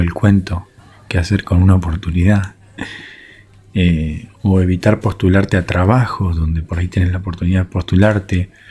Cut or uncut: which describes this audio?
uncut